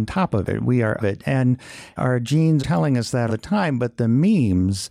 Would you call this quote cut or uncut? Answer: cut